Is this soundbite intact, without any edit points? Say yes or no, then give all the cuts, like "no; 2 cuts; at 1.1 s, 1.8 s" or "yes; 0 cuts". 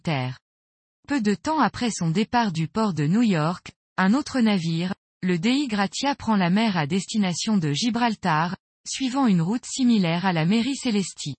yes; 0 cuts